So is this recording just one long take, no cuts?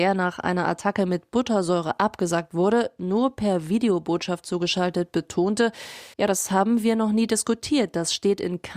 no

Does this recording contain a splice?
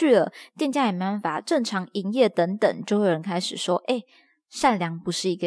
no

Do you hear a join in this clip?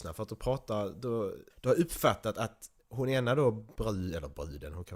yes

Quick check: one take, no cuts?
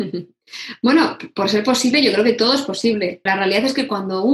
no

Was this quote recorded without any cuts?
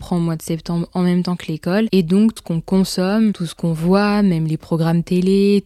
no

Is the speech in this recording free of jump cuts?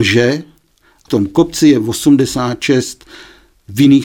no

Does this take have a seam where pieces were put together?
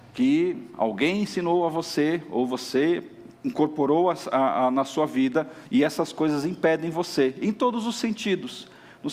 yes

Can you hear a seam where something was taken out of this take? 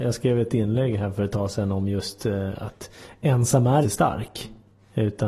yes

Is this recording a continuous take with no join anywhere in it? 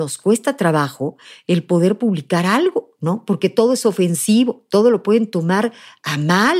yes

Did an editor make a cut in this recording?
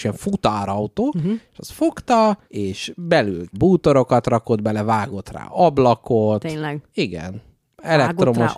yes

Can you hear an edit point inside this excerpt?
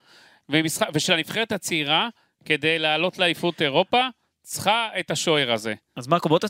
no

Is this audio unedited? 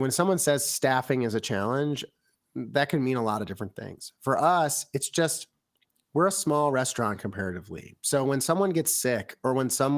yes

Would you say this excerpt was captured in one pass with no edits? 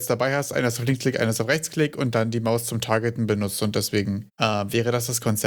yes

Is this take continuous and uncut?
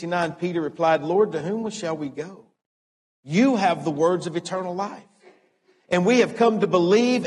yes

